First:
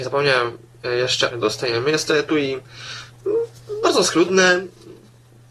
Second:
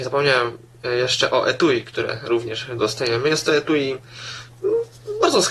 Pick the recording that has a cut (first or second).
first